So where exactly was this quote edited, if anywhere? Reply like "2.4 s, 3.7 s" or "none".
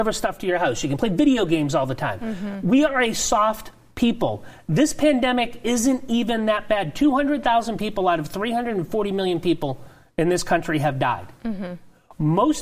none